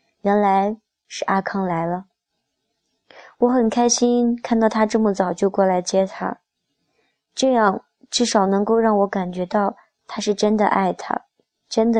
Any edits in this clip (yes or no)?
no